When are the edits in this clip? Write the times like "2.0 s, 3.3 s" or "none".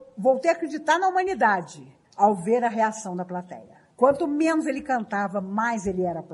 2.0 s, 3.9 s